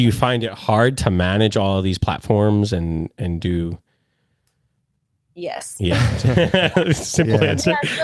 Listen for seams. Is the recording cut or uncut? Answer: uncut